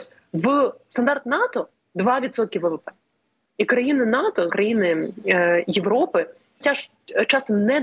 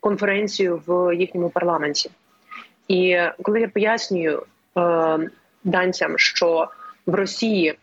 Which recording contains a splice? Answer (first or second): first